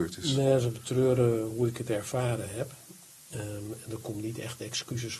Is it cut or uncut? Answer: uncut